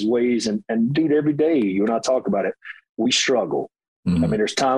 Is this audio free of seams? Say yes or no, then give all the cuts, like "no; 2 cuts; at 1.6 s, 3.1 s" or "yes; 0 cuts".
yes; 0 cuts